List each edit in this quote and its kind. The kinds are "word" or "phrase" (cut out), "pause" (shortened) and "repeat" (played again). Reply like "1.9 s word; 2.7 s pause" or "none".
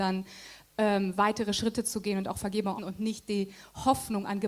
2.8 s word